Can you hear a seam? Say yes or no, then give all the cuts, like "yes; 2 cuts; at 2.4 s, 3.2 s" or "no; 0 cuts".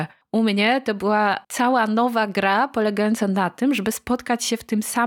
no; 0 cuts